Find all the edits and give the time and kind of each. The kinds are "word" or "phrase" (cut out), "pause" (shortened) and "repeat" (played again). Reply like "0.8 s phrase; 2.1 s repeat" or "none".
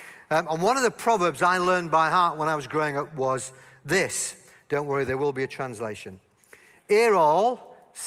none

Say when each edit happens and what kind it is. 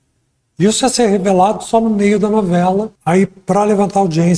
3.0 s pause

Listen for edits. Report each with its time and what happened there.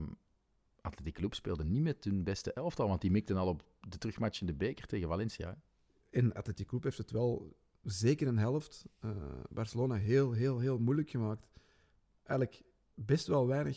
none

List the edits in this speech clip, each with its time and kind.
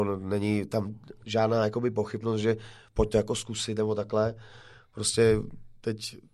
none

